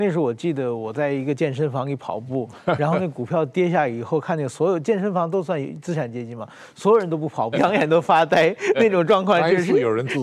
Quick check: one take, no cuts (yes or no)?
no